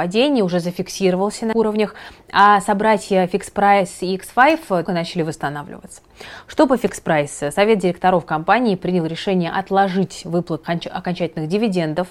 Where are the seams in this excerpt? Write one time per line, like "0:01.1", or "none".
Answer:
0:01.5
0:04.9
0:10.6